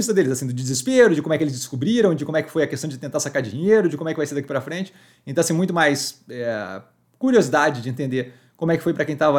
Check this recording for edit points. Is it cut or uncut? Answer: uncut